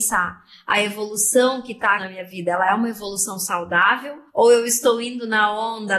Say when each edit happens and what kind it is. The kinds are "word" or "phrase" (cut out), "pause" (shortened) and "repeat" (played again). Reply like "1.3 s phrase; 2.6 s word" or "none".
2.0 s word; 4.3 s pause